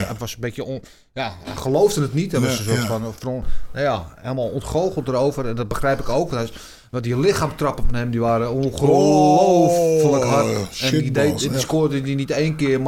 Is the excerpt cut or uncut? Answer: uncut